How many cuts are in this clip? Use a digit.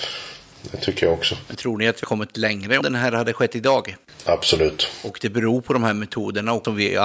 2